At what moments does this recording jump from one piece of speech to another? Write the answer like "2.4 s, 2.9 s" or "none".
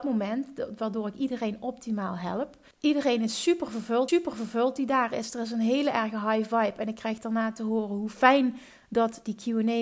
2.7 s, 4.1 s